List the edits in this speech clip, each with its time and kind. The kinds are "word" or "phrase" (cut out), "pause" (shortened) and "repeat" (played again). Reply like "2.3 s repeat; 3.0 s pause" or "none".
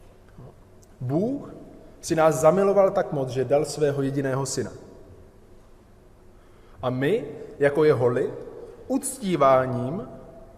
none